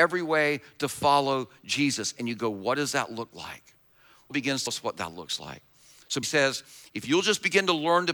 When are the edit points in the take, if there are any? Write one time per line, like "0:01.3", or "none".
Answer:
0:04.3
0:04.7
0:06.2

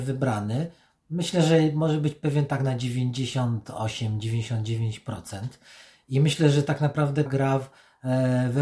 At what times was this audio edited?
0:07.3

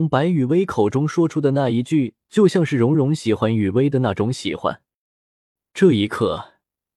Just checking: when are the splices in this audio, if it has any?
none

